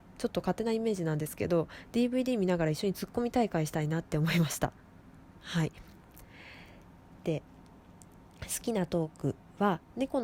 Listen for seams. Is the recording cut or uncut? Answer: uncut